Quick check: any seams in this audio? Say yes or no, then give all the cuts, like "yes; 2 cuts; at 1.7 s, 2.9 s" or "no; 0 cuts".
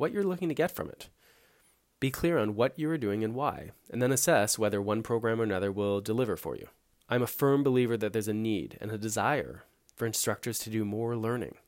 no; 0 cuts